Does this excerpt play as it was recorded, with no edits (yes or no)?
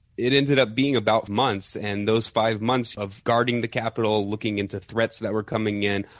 no